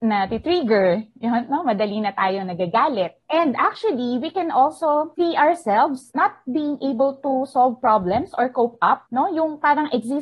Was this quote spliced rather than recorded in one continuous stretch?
no; 0 cuts

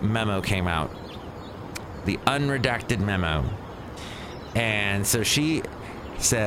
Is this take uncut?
yes; 0 cuts

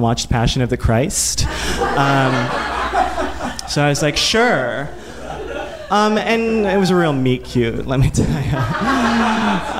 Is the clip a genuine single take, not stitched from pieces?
yes; 0 cuts

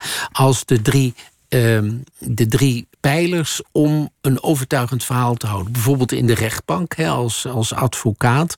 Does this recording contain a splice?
yes; 2 cuts; at 2.9 s, 4.1 s

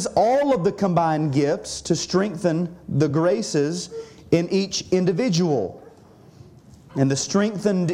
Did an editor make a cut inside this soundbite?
no; 0 cuts

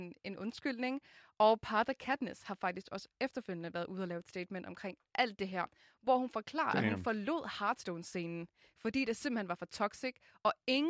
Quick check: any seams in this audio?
no; 0 cuts

